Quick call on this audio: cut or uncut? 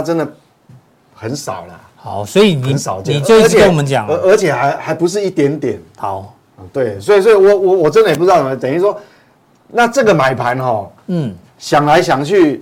uncut